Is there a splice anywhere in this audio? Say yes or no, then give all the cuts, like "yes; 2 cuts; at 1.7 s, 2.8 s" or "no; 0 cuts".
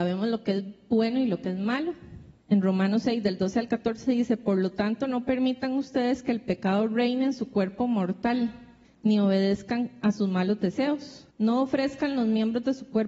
yes; 3 cuts; at 2.4 s, 8.8 s, 11.3 s